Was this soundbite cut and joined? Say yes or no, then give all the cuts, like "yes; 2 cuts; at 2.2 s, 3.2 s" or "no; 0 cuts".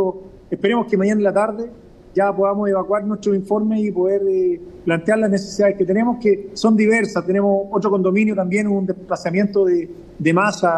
no; 0 cuts